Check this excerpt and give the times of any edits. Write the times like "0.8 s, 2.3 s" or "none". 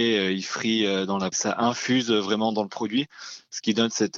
1.3 s